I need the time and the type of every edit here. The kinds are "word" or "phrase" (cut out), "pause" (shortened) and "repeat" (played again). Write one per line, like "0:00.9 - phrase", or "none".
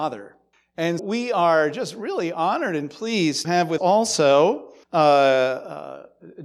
0:01.0 - word
0:03.4 - word
0:03.8 - word
0:04.8 - pause

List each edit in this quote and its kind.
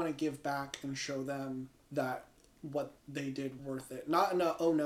0:01.7 - pause
0:03.0 - pause
0:03.6 - word

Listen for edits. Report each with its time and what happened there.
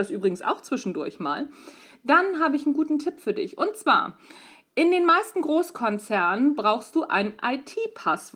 none

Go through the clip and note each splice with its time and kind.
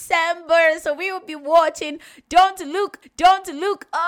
0:03.0 - repeat

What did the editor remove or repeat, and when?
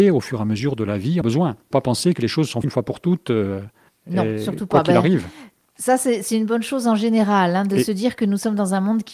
0:01.2 - phrase
0:01.7 - word
0:02.6 - word
0:03.9 - pause

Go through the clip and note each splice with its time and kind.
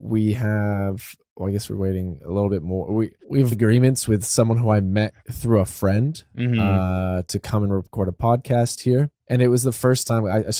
0:03.2 - pause
0:03.5 - word
0:05.2 - pause
0:09.2 - pause

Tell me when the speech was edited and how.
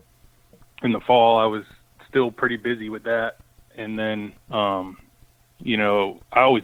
0:04.4 - pause

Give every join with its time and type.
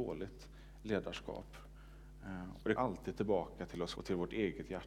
0:02.8 - word
0:03.9 - word

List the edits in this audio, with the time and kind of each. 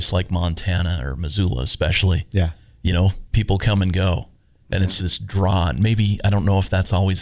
0:05.0 - word

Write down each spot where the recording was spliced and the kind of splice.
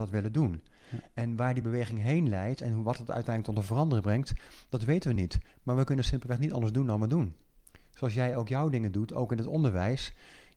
none

